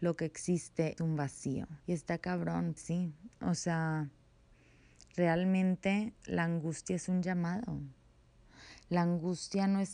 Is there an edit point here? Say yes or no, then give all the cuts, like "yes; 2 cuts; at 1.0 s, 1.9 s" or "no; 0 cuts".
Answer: yes; 4 cuts; at 1.0 s, 1.8 s, 2.8 s, 6.2 s